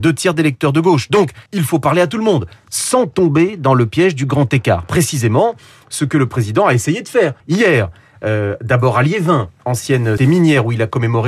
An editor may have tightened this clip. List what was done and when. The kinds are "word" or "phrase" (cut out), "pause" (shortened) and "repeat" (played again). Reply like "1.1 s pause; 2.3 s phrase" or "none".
1.5 s pause; 7.4 s pause; 10.2 s word

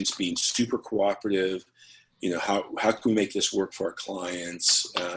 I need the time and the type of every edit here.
none

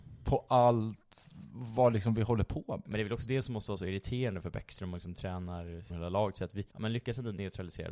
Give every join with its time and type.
5.9 s word; 6.7 s pause

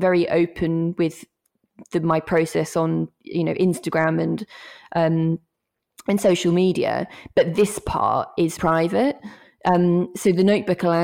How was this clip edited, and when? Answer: 8.6 s word

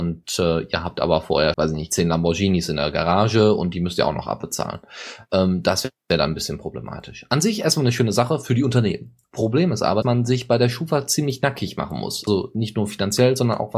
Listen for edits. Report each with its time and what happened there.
1.5 s word; 10.0 s word

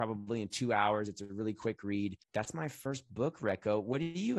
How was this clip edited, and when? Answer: 2.2 s pause

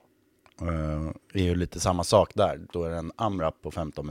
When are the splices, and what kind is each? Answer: 2.7 s word

